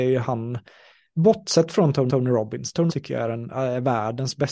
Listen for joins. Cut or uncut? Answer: cut